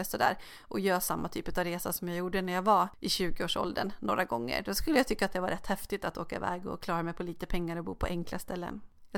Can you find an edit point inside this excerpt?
no; 0 cuts

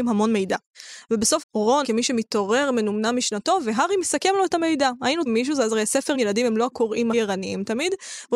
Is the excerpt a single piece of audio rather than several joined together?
no; 5 cuts; at 1.4 s, 1.8 s, 5.3 s, 6.1 s, 7.1 s

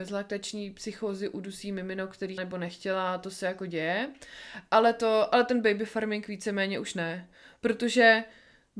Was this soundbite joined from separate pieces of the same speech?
yes; 1 cut; at 2.4 s

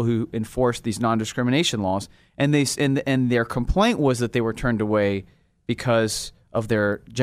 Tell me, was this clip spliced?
no; 0 cuts

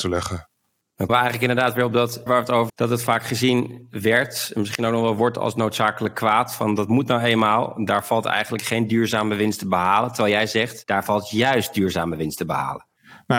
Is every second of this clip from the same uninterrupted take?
no; 3 cuts; at 1.1 s, 2.3 s, 2.7 s

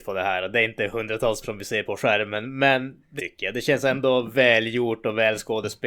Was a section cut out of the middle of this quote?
yes; 3 cuts; at 1.4 s, 1.8 s, 3.2 s

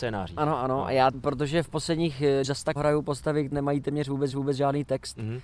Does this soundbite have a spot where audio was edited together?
yes; 5 cuts; at 1.1 s, 2.4 s, 2.8 s, 3.5 s, 4.3 s

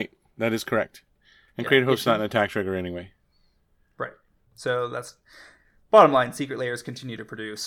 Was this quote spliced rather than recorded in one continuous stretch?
no; 0 cuts

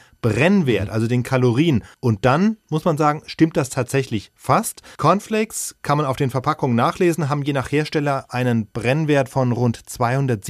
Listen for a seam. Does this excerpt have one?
yes; 2 cuts; at 1.9 s, 4.9 s

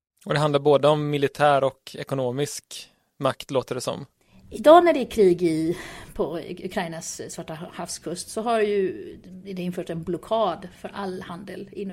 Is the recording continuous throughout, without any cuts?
yes; 0 cuts

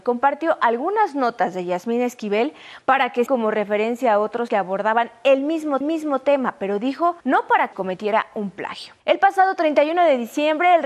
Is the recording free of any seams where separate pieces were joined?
no; 6 cuts; at 3.3 s, 4.5 s, 5.8 s, 7.2 s, 7.7 s, 9.0 s

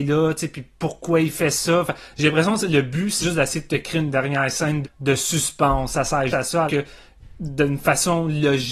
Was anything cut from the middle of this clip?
yes; 4 cuts; at 3.2 s, 4.8 s, 6.3 s, 6.7 s

